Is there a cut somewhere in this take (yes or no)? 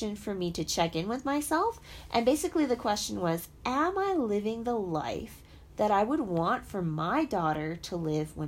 no